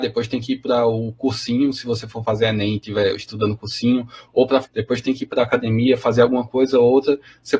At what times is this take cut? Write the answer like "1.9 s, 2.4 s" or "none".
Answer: 4.6 s